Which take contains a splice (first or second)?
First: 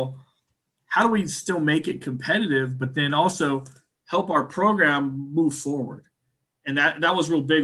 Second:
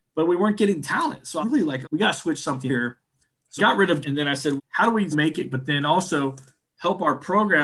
second